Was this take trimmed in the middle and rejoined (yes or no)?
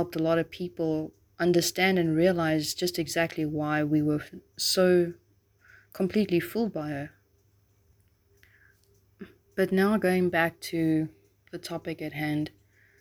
no